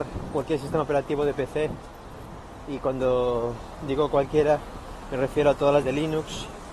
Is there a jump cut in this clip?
yes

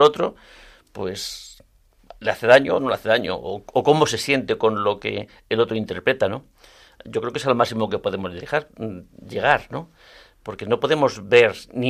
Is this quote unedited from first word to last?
yes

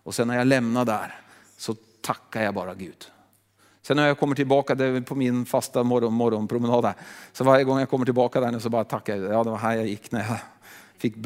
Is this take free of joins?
yes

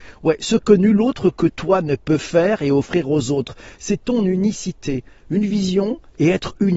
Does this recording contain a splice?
no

